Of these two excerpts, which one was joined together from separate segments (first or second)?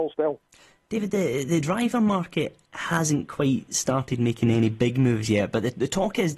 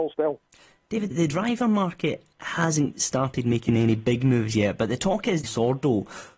second